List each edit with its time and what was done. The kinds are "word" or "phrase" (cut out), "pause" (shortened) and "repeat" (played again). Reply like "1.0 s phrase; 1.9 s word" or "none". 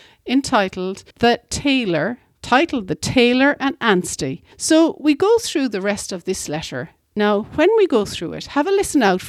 1.1 s pause; 4.5 s pause

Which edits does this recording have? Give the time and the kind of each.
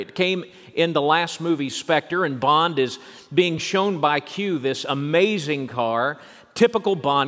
none

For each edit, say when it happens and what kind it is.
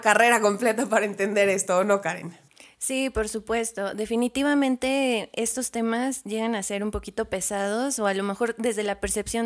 none

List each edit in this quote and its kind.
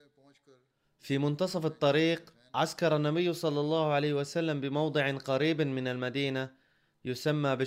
none

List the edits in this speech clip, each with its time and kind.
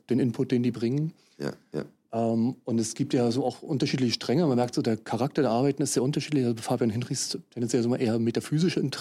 none

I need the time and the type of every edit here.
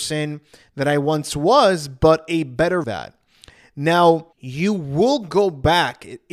2.8 s phrase; 4.3 s pause

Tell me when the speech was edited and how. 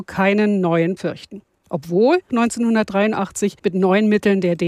1.0 s word; 2.3 s word; 3.6 s pause

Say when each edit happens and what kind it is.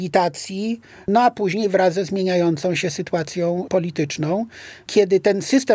none

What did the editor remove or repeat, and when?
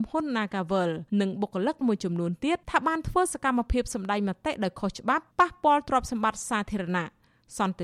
1.1 s pause; 1.8 s word; 2.6 s pause; 5.3 s pause

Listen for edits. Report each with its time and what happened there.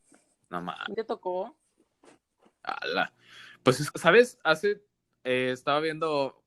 0.9 s phrase; 3.9 s word

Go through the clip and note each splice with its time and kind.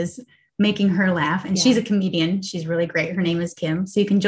none

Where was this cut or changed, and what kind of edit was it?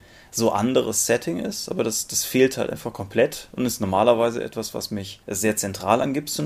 5.2 s pause

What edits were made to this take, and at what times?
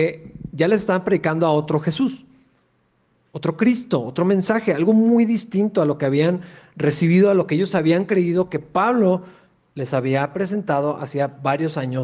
none

